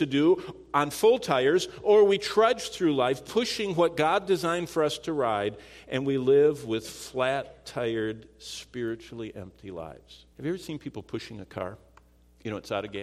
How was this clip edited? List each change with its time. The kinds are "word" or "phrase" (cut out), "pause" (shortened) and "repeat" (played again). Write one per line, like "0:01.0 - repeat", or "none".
0:10.3 - pause